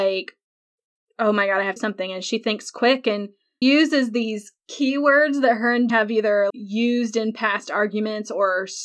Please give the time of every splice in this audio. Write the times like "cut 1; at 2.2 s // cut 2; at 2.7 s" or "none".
cut 1; at 1.8 s // cut 2; at 3.6 s // cut 3; at 5.9 s // cut 4; at 6.5 s